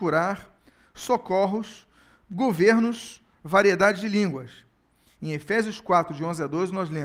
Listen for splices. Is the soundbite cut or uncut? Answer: uncut